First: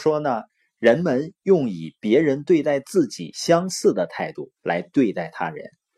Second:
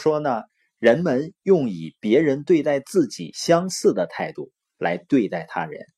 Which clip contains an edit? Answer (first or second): first